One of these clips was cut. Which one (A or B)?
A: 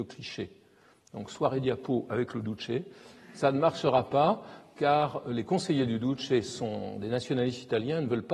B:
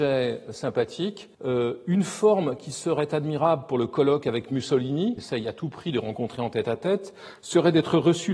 B